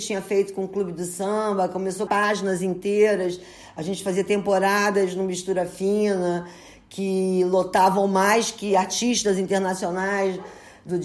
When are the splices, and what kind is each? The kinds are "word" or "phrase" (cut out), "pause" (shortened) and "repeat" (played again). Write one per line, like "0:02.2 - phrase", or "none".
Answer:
0:02.1 - word

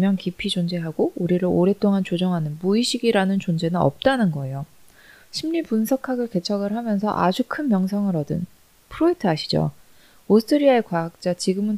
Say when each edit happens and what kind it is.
none

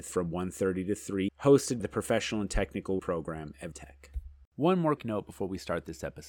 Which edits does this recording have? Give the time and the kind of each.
0:01.3 - word
0:01.8 - word
0:03.0 - word
0:03.7 - word
0:05.0 - word

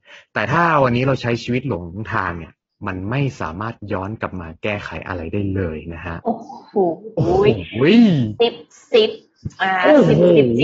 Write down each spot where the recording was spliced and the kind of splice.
none

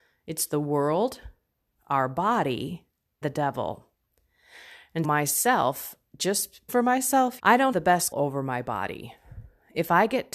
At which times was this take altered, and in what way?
0:03.2 - word
0:05.0 - word
0:06.7 - word
0:07.4 - word
0:07.7 - word
0:08.1 - word

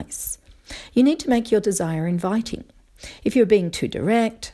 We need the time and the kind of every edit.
none

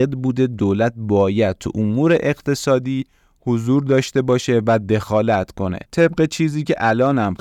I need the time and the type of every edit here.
none

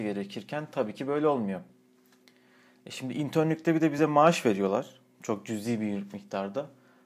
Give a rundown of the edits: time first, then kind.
none

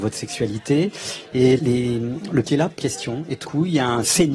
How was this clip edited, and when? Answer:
0:01.6 - word
0:02.4 - word
0:02.8 - phrase
0:03.4 - word

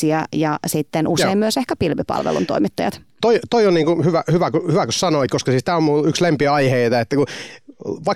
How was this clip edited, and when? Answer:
none

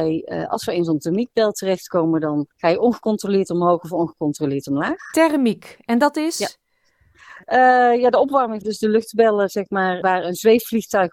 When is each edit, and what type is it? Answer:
0:02.5 - pause
0:08.6 - phrase
0:10.0 - word

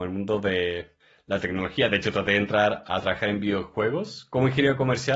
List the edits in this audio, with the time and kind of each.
none

